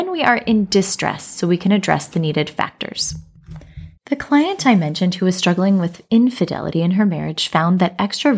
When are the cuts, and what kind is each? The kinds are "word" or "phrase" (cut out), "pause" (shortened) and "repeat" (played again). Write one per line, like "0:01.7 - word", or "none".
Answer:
0:04.0 - pause